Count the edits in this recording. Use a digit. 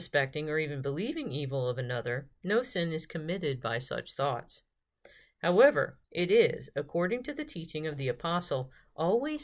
1